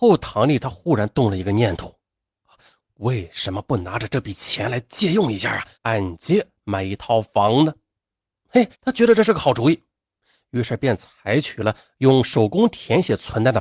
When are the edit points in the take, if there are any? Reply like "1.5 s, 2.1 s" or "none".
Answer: 5.7 s, 8.7 s